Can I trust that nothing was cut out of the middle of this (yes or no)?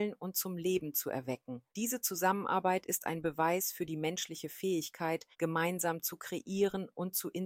no